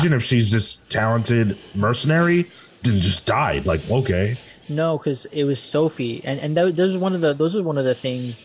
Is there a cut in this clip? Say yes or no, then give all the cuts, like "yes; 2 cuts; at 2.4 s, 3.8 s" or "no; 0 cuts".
no; 0 cuts